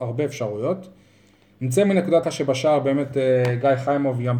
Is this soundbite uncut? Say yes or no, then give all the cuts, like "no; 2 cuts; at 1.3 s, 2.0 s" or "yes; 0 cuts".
no; 1 cut; at 2.2 s